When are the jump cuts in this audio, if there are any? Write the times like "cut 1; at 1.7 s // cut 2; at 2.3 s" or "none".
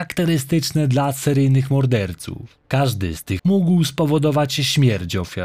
cut 1; at 2.6 s // cut 2; at 3.4 s